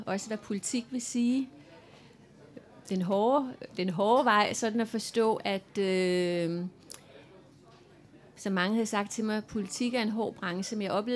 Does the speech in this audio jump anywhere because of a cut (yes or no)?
no